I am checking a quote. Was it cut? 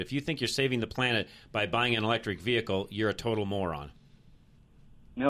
no; 0 cuts

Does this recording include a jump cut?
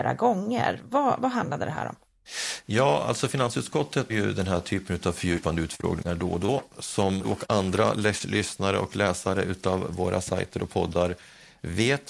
yes; 2 cuts; at 4.1 s, 7.2 s

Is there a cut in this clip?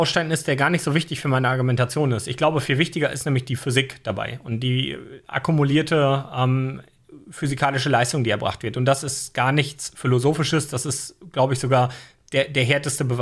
no; 0 cuts

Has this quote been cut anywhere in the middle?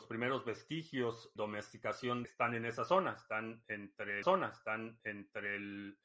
yes; 3 cuts; at 1.4 s, 2.2 s, 4.2 s

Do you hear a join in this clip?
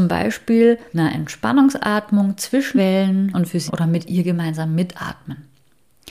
yes; 4 cuts; at 0.9 s, 2.8 s, 3.3 s, 3.7 s

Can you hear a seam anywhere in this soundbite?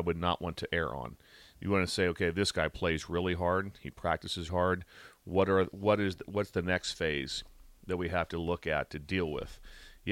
yes; 1 cut; at 4.5 s

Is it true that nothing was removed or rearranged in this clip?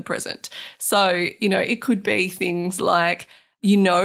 yes; 0 cuts

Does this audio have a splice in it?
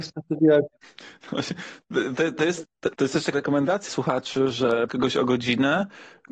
yes; 4 cuts; at 2.9 s, 3.3 s, 3.9 s, 4.9 s

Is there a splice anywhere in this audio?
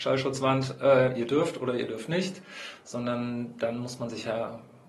no; 0 cuts

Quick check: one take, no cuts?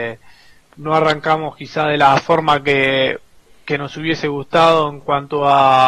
yes; 0 cuts

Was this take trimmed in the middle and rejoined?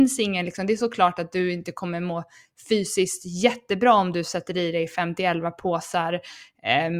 no; 0 cuts

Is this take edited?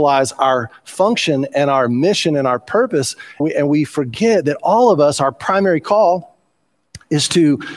yes; 1 cut; at 3.4 s

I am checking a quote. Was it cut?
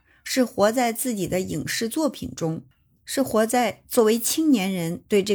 no; 0 cuts

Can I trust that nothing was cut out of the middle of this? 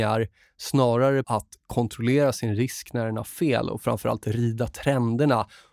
no; 1 cut; at 1.2 s

